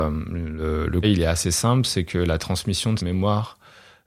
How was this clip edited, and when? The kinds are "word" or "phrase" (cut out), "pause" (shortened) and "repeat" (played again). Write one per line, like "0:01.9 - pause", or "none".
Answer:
0:01.0 - word
0:03.0 - word